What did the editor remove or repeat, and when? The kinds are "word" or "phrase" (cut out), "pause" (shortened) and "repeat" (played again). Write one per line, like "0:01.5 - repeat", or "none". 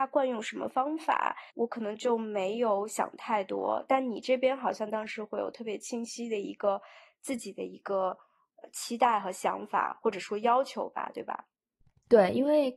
0:01.5 - pause